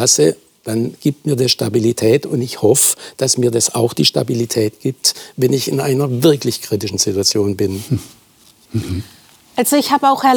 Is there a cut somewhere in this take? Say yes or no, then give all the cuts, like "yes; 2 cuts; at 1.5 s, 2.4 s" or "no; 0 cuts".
no; 0 cuts